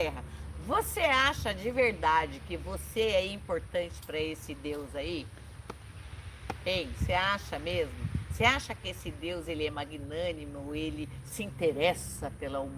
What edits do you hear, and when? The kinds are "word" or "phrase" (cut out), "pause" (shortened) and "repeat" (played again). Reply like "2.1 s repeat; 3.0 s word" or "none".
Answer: none